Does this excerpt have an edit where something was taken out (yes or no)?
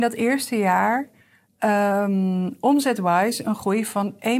no